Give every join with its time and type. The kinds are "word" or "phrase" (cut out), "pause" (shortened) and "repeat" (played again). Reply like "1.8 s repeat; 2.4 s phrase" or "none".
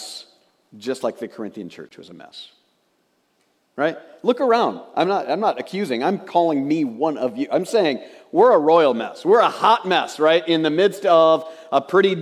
none